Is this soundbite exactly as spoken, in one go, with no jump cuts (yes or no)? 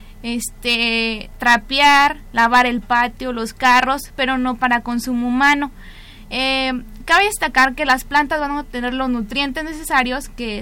yes